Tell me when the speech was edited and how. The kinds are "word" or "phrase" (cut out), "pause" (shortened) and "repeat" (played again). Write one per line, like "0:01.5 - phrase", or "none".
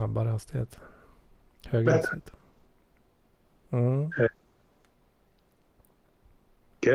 none